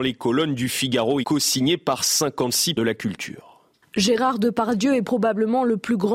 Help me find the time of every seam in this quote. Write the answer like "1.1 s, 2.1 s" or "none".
1.2 s, 2.8 s